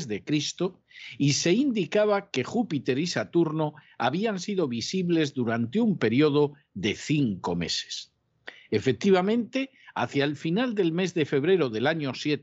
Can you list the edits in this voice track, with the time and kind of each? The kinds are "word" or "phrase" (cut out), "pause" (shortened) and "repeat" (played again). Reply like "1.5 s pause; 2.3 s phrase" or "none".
none